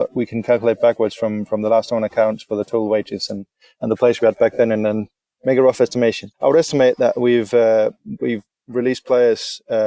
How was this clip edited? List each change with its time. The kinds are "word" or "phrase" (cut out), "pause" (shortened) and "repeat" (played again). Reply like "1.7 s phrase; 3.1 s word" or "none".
6.3 s pause